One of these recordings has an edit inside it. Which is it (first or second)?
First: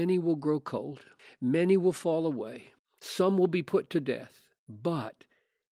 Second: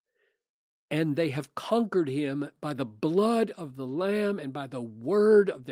first